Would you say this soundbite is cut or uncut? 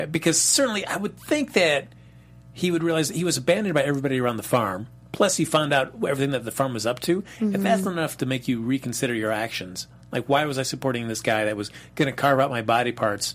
uncut